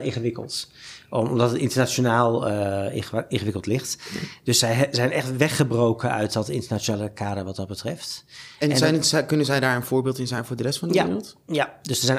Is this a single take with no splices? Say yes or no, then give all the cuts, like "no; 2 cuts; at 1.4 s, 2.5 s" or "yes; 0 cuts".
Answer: yes; 0 cuts